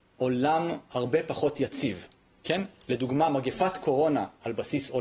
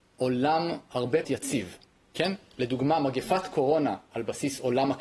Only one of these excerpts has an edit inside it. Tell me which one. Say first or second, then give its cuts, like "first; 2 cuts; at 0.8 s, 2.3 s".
second; 1 cut; at 1.2 s